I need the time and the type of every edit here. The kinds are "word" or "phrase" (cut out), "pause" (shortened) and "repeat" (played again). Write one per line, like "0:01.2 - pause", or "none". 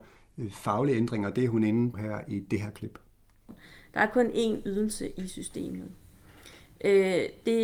0:01.9 - word